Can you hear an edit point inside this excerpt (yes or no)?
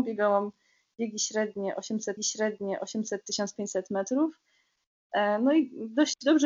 yes